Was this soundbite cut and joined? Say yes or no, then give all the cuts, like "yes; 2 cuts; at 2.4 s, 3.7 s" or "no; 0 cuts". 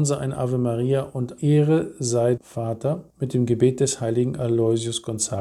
yes; 3 cuts; at 1.4 s, 2.4 s, 3.1 s